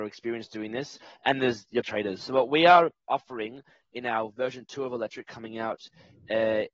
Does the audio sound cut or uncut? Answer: cut